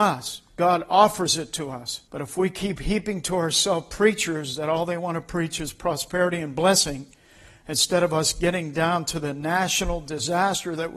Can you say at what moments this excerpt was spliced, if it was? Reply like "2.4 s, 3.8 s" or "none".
2.1 s